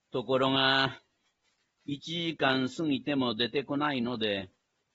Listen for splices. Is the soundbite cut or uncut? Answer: uncut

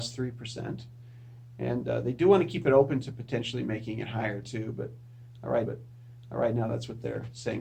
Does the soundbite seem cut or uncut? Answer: cut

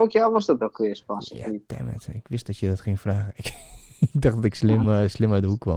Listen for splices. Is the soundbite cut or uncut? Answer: uncut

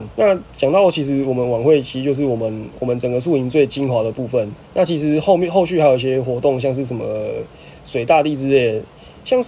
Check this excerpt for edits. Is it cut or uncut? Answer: cut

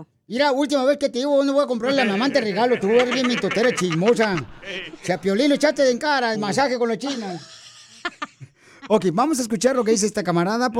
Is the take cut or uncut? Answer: cut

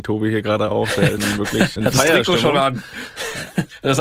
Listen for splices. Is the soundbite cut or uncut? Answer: cut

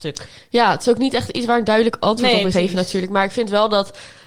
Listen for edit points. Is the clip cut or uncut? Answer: cut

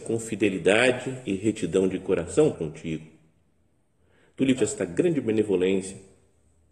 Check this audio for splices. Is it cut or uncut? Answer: cut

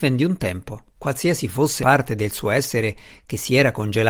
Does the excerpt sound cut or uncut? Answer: cut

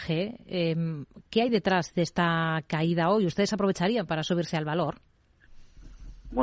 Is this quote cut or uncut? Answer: uncut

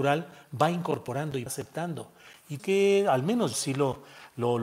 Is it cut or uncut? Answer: cut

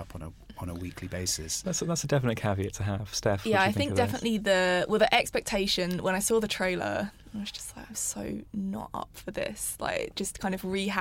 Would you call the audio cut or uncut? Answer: uncut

